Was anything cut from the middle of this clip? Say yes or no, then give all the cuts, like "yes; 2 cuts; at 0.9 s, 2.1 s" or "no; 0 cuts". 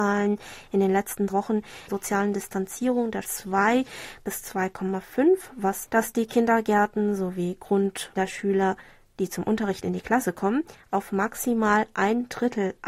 yes; 5 cuts; at 1.3 s, 1.9 s, 3.2 s, 5.9 s, 8.1 s